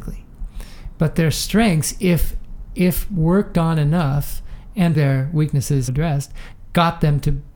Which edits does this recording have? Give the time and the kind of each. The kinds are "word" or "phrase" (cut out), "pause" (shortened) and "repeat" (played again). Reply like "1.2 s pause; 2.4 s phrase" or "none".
4.9 s word; 5.9 s word